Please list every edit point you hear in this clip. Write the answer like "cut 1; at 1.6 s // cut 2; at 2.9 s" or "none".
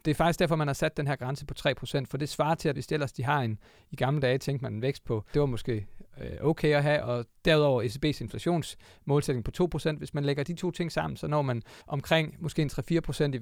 cut 1; at 2.7 s // cut 2; at 5.3 s // cut 3; at 7.4 s // cut 4; at 11.8 s

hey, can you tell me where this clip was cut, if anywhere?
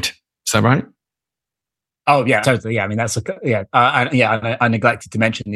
cut 1; at 2.4 s

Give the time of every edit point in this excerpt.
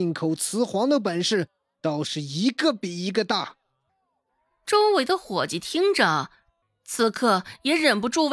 cut 1; at 6.6 s

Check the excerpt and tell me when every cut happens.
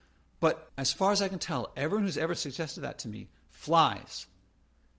none

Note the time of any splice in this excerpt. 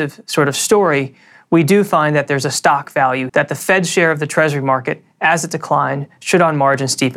cut 1; at 3.3 s

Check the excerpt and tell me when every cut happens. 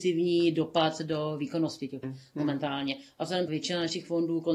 cut 1; at 2.0 s // cut 2; at 3.5 s

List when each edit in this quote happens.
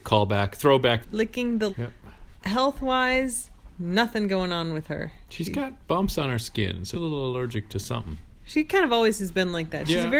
cut 1; at 1.0 s // cut 2; at 1.7 s // cut 3; at 2.3 s // cut 4; at 5.3 s // cut 5; at 6.9 s

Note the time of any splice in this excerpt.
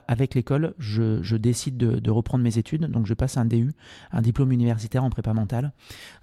none

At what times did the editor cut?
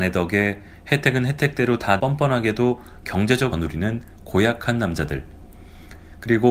cut 1; at 2.0 s // cut 2; at 3.5 s

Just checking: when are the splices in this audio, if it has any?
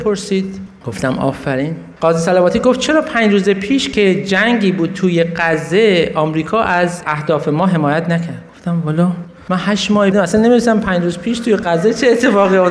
cut 1; at 2.0 s // cut 2; at 10.1 s

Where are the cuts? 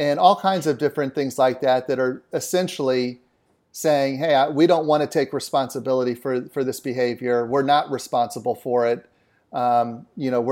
none

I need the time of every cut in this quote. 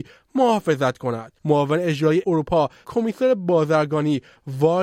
cut 1; at 1.4 s // cut 2; at 2.2 s // cut 3; at 2.8 s

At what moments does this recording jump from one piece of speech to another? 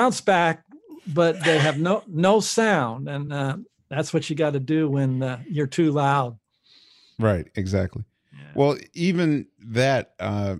none

